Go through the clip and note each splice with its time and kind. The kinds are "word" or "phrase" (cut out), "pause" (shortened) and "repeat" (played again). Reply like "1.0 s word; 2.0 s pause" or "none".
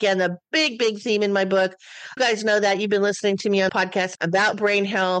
2.2 s word; 3.7 s word; 4.2 s word